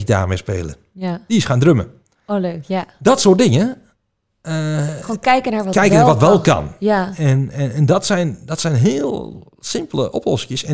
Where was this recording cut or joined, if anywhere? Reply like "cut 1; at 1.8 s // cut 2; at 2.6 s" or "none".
none